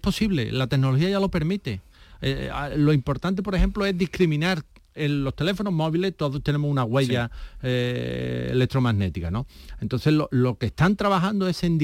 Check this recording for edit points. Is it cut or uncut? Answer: uncut